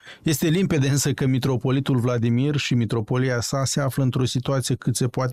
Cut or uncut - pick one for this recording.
uncut